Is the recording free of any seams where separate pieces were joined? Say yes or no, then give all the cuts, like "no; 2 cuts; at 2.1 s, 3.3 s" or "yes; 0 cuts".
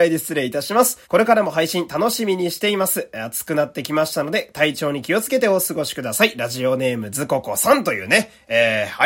no; 1 cut; at 1.0 s